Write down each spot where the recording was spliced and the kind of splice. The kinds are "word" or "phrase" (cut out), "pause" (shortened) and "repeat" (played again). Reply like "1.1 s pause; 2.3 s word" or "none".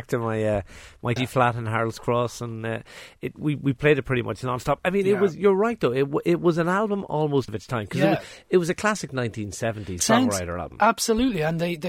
1.2 s phrase; 7.5 s word; 10.0 s word